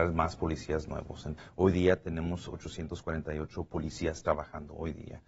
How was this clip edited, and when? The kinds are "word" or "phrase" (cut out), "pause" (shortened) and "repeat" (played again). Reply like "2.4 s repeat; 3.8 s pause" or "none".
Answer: none